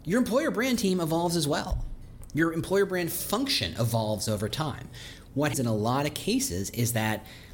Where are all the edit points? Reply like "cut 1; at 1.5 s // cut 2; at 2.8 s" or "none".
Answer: cut 1; at 5.5 s